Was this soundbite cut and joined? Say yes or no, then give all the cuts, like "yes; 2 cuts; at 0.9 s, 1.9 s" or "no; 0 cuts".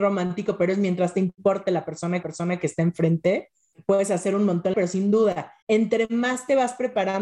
yes; 3 cuts; at 2.2 s, 4.7 s, 5.6 s